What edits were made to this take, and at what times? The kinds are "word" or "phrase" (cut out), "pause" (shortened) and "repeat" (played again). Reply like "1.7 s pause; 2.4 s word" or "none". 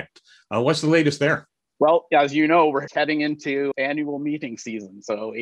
1.6 s pause; 2.9 s word; 3.7 s word